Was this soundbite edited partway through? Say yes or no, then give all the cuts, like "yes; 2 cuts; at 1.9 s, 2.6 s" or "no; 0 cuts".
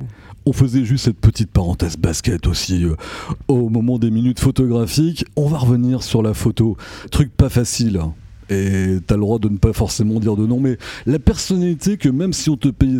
no; 0 cuts